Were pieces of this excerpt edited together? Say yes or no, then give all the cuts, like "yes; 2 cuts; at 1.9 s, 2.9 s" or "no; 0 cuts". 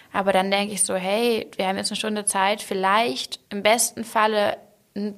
yes; 1 cut; at 3.4 s